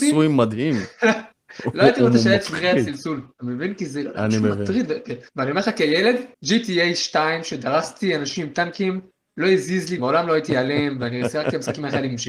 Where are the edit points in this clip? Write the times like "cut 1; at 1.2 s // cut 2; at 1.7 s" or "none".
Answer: cut 1; at 3.3 s // cut 2; at 5.3 s // cut 3; at 6.3 s // cut 4; at 10.0 s